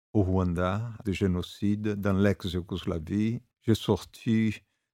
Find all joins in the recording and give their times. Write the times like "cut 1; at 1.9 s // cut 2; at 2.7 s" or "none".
cut 1; at 1.0 s // cut 2; at 3.5 s